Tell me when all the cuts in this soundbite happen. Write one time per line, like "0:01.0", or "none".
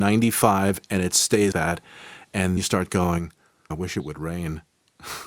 0:01.5
0:02.6
0:03.7